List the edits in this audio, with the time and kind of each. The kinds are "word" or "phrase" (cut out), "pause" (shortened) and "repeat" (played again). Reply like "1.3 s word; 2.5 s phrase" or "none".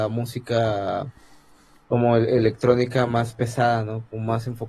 none